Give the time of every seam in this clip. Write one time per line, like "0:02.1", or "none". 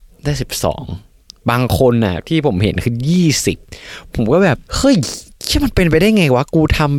0:04.6